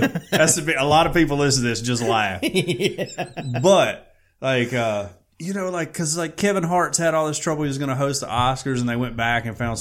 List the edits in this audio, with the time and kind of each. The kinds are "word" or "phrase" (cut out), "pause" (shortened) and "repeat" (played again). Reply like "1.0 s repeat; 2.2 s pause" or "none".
none

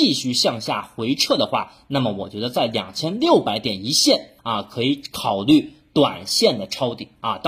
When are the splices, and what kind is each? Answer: 4.4 s pause

